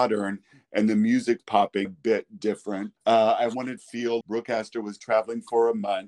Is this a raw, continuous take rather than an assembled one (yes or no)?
no